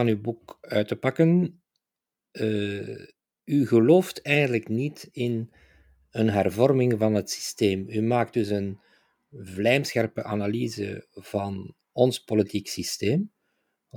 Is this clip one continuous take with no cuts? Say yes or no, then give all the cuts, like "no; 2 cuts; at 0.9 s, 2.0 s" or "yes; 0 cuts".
yes; 0 cuts